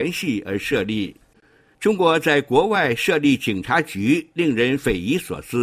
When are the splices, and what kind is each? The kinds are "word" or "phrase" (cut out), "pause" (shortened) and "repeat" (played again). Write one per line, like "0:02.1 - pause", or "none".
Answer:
none